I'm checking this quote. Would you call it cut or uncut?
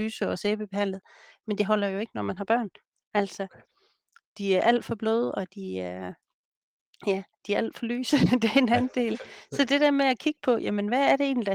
cut